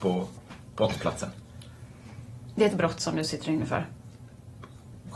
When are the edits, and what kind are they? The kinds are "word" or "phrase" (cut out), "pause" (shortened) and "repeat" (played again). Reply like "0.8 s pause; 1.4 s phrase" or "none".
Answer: 2.7 s word